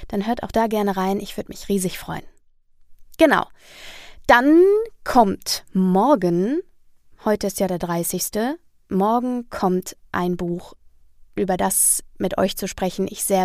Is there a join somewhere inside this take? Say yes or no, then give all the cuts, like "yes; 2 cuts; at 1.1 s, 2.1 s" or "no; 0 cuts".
no; 0 cuts